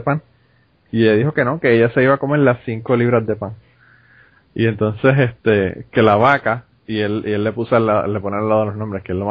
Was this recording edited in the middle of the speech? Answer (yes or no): no